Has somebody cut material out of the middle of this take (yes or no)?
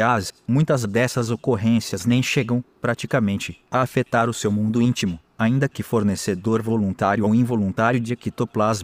no